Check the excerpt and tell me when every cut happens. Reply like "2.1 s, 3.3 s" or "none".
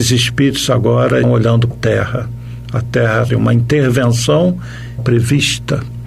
1.2 s, 1.7 s, 3.3 s, 5.0 s